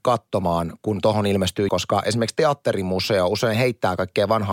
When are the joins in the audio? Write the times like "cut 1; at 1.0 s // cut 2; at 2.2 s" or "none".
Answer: cut 1; at 1.7 s